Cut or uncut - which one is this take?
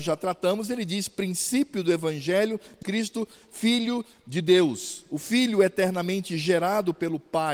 cut